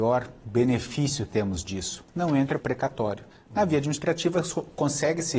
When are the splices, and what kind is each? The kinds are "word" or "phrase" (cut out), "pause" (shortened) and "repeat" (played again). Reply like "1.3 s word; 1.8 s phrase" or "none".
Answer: 1.3 s word; 2.1 s pause; 2.6 s phrase; 3.3 s pause